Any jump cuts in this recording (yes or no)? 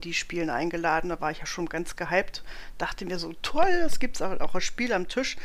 no